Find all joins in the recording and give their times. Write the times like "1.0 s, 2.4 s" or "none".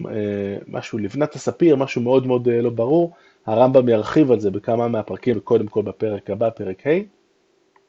5.3 s